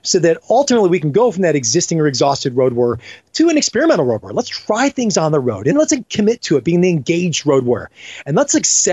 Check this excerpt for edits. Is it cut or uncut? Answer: cut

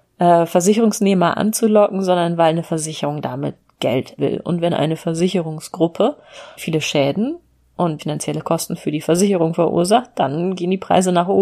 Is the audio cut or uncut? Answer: cut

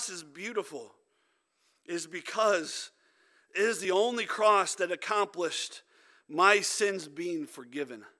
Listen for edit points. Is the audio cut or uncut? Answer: uncut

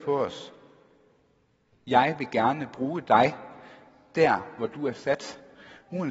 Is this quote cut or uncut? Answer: uncut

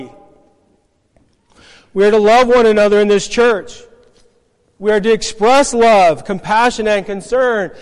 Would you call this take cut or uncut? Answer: uncut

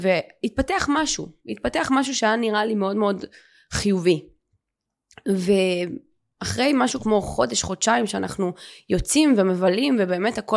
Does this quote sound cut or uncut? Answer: uncut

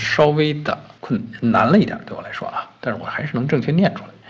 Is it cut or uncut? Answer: cut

